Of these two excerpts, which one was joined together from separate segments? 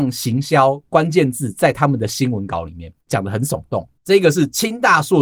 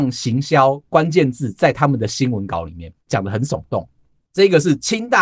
first; 1 cut; at 4.0 s

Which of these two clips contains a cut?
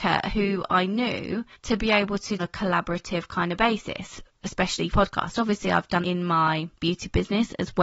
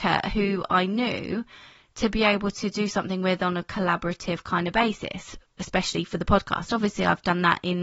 first; 5 cuts; at 1.5 s, 2.4 s, 4.9 s, 6.0 s, 6.8 s

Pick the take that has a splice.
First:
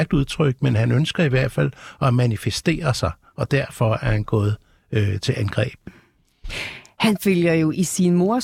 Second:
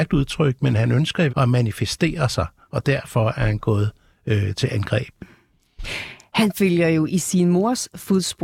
second; 1 cut; at 1.3 s

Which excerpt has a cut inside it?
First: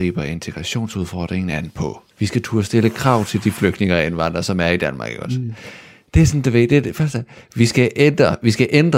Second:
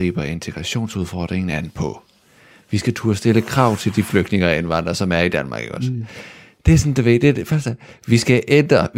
first; 1 cut; at 2.1 s

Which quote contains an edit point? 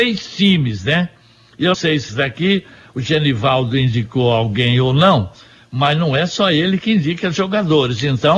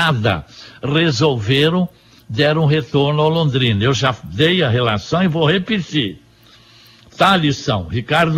first; 2 cuts; at 1.7 s, 2.1 s

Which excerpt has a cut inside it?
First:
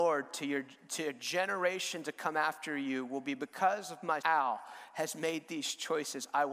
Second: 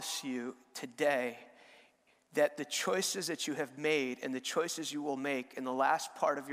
first; 1 cut; at 4.2 s

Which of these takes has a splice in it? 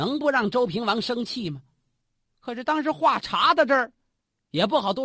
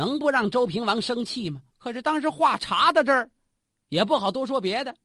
second; 1 cut; at 1.7 s

